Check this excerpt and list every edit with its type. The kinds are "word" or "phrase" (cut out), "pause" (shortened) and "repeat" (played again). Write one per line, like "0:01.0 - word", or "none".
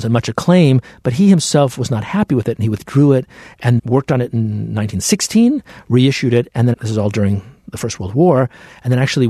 0:03.8 - word
0:06.7 - word